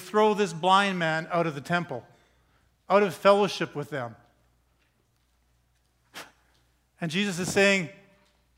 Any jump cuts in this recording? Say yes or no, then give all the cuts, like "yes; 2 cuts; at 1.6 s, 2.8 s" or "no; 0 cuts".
no; 0 cuts